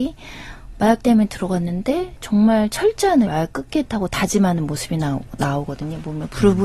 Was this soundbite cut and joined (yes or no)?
yes